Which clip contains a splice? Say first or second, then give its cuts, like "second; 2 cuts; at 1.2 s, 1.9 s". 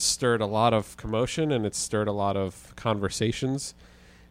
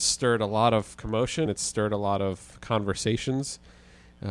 second; 1 cut; at 1.5 s